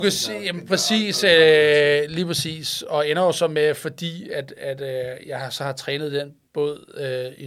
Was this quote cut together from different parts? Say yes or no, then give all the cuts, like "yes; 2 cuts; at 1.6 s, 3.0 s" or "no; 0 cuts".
yes; 1 cut; at 6.4 s